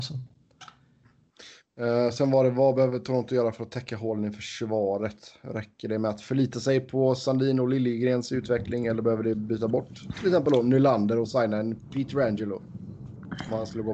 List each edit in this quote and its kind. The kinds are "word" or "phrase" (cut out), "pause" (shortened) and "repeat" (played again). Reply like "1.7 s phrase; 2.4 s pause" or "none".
none